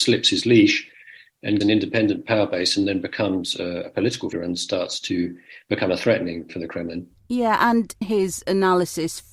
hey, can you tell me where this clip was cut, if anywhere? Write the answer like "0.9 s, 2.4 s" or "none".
1.6 s, 4.3 s, 6.5 s, 8.0 s